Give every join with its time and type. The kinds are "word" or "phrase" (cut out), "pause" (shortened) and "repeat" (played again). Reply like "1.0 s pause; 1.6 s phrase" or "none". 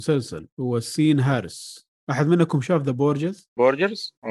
none